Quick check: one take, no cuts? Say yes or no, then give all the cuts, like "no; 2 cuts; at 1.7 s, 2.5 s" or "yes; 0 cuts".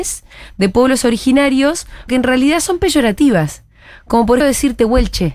no; 2 cuts; at 2.1 s, 4.4 s